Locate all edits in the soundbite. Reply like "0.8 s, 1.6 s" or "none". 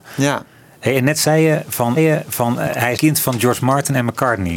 2.0 s, 3.0 s

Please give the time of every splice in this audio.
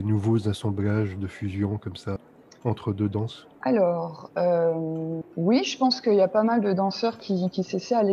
none

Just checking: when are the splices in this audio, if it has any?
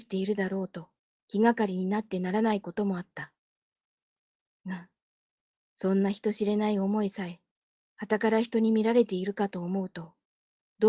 none

